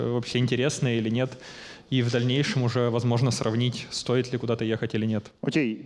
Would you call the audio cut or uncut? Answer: uncut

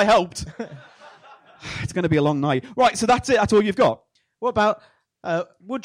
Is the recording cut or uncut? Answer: uncut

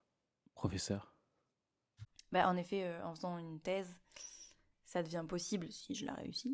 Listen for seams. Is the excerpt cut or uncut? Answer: uncut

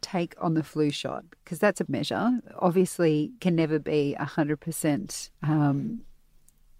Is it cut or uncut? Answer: cut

